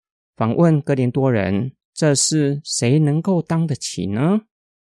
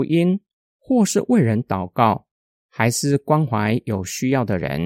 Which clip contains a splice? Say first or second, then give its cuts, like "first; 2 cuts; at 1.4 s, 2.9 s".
first; 1 cut; at 1.8 s